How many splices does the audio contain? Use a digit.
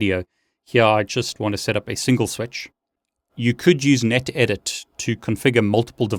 0